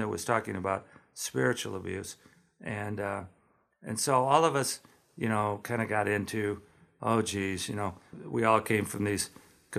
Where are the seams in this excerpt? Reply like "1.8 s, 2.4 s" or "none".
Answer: none